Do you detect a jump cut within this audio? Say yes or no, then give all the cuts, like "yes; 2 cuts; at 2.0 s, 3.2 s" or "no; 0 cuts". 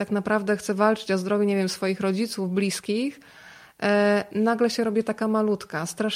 no; 0 cuts